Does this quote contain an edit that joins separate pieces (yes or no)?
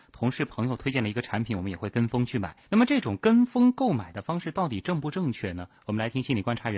yes